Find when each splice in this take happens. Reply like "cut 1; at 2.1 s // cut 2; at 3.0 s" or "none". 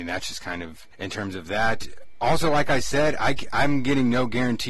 cut 1; at 0.9 s